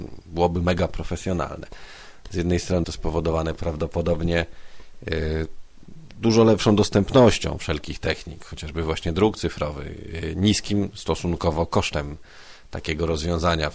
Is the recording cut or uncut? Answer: cut